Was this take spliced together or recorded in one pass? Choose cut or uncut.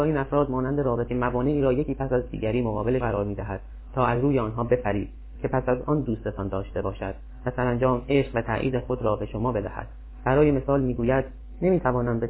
cut